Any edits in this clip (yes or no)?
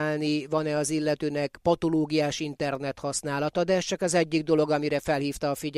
no